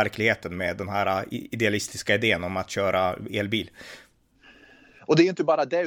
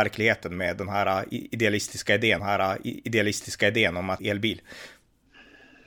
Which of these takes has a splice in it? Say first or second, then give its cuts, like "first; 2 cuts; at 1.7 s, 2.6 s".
second; 2 cuts; at 2.4 s, 4.2 s